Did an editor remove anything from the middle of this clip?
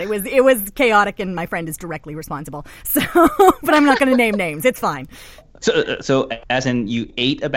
no; 0 cuts

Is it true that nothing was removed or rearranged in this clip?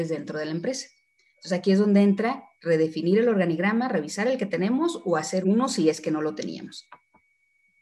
no; 2 cuts; at 2.5 s, 5.4 s

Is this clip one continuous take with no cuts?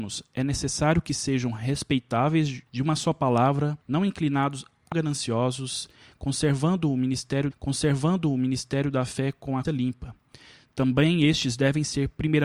no; 5 cuts; at 2.7 s, 3.8 s, 4.9 s, 7.5 s, 9.6 s

